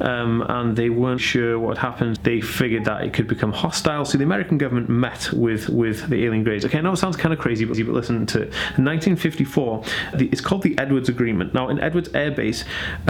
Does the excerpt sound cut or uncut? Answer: cut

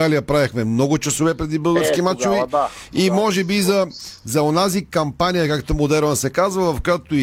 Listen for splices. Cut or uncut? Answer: uncut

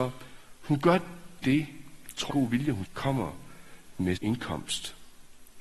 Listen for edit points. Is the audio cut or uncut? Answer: cut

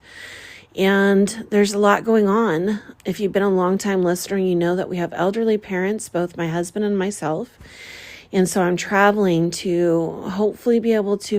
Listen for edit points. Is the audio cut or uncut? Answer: cut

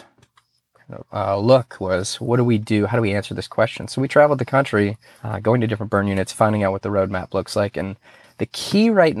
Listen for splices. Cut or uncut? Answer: uncut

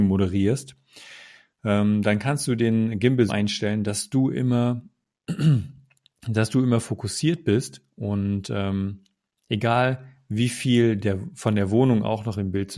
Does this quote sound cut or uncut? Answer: cut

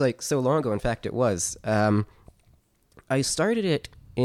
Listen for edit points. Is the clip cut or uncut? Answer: uncut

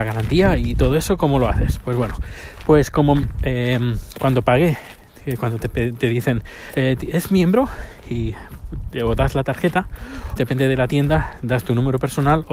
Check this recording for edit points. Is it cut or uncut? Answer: cut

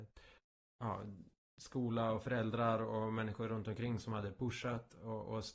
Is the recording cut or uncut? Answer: uncut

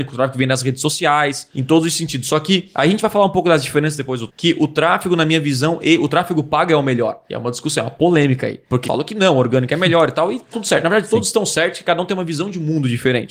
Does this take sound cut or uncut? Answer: cut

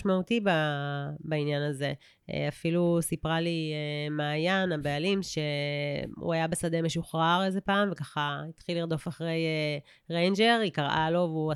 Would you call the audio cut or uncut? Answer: uncut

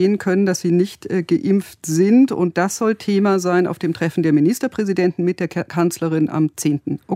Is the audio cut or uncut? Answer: uncut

